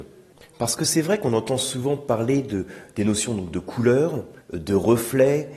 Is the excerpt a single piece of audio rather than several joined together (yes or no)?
no